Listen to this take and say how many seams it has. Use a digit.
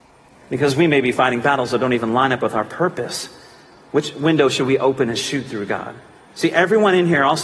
0